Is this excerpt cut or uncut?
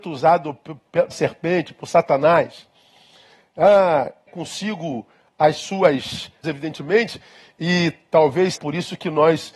cut